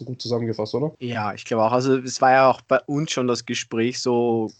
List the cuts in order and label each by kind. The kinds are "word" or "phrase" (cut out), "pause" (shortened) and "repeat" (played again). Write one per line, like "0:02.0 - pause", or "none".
0:00.9 - pause